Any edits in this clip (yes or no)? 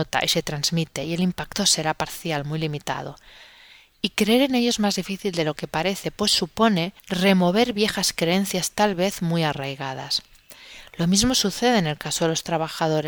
yes